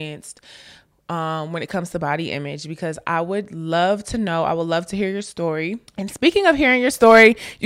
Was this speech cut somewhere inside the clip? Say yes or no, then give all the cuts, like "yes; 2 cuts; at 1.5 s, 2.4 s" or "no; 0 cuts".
yes; 1 cut; at 5.9 s